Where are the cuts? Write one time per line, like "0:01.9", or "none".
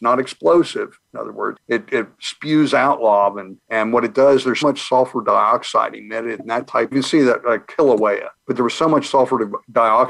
0:01.6
0:03.6
0:04.6
0:06.9
0:08.4

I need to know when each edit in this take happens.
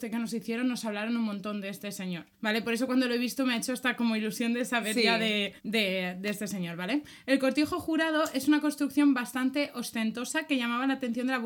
0:02.3
0:05.6

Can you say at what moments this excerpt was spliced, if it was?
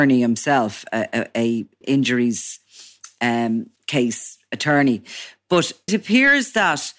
0:01.8
0:03.8
0:05.9

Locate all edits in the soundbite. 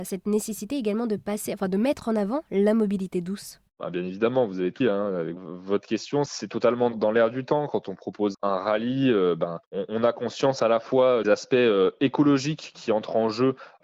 0:03.7
0:04.8
0:05.4
0:08.3
0:09.6
0:11.2

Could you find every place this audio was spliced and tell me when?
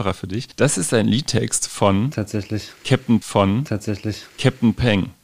0:03.2

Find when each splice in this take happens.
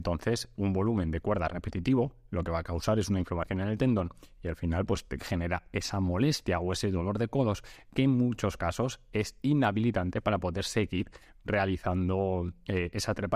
none

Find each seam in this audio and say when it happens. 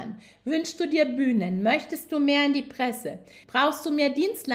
none

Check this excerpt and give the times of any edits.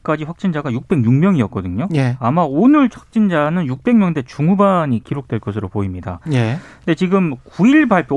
0:02.9

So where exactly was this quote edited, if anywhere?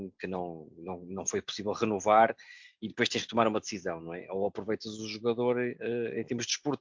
none

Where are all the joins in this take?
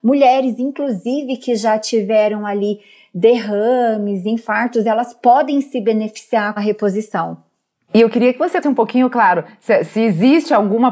0:06.6
0:08.6

